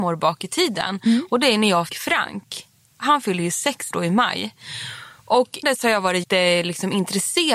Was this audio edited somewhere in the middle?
yes; 4 cuts; at 1.9 s, 3.9 s, 5.6 s, 6.2 s

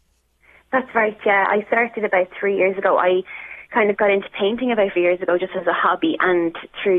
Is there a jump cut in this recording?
yes; 1 cut; at 5.0 s

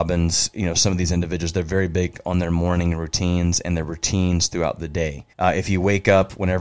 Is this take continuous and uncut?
no; 1 cut; at 5.3 s

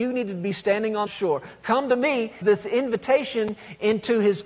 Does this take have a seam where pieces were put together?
yes; 2 cuts; at 1.1 s, 2.4 s

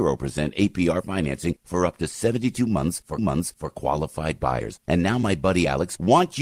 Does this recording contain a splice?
yes; 1 cut; at 3.2 s

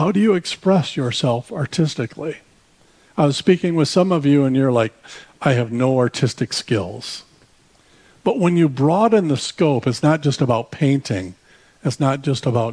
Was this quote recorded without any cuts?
yes; 0 cuts

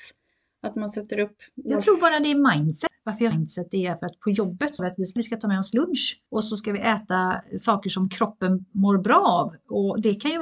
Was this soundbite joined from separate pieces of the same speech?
yes; 4 cuts; at 3.3 s, 4.8 s, 5.2 s, 6.3 s

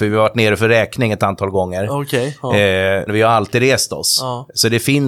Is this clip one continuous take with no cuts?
no; 1 cut; at 3.1 s

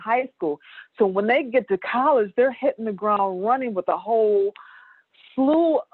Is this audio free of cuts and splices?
yes; 0 cuts

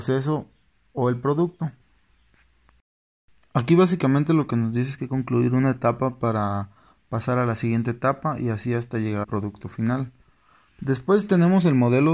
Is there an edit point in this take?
yes; 2 cuts; at 5.0 s, 9.2 s

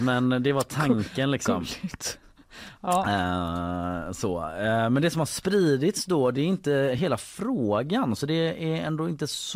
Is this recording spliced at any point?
no; 0 cuts

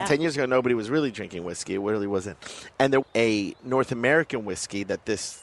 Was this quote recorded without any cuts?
no; 1 cut; at 3.0 s

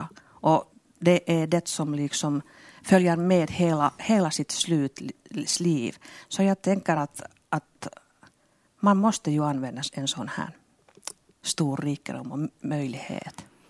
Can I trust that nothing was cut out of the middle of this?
yes; 0 cuts

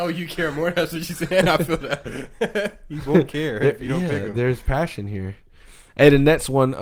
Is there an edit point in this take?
no; 0 cuts

